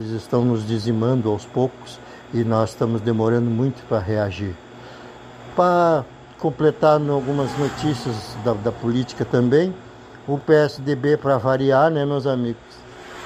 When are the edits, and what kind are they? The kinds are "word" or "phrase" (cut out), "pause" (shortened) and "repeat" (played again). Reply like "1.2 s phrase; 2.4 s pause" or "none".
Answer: none